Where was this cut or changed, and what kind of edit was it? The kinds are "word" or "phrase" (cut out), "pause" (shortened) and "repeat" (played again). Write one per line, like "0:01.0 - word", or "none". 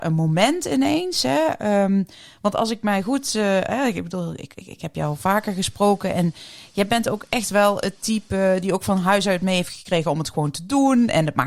none